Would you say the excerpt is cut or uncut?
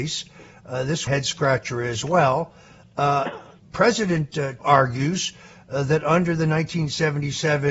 cut